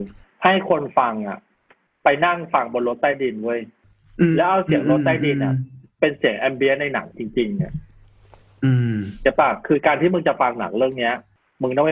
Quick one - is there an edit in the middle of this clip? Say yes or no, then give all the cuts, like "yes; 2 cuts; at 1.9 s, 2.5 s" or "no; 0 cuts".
no; 0 cuts